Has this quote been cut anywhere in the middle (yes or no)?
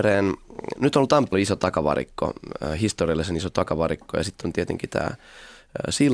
yes